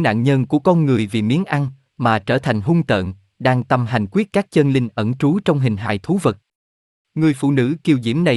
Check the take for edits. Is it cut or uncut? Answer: uncut